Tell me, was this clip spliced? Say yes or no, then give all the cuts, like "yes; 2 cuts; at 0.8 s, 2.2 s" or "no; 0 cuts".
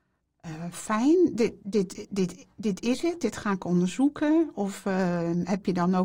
no; 0 cuts